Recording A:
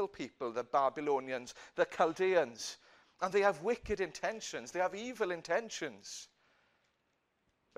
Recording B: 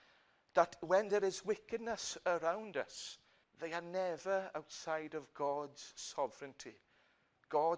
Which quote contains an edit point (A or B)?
B